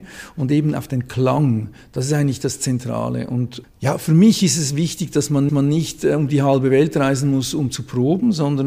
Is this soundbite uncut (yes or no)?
no